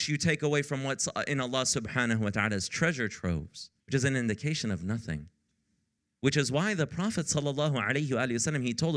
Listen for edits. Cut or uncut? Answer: cut